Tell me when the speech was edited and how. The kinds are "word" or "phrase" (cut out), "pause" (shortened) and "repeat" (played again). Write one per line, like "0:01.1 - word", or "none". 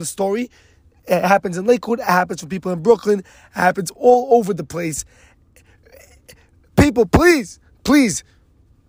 none